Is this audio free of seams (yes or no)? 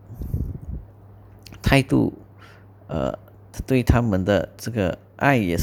yes